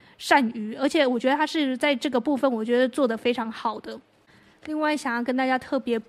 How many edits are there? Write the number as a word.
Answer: zero